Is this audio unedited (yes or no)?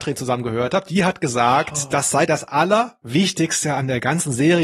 yes